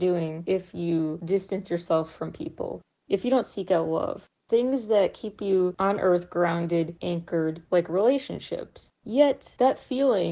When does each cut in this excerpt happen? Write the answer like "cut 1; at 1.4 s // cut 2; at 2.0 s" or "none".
cut 1; at 9.0 s